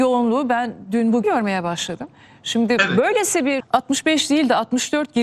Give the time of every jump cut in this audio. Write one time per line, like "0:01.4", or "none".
0:01.2
0:03.6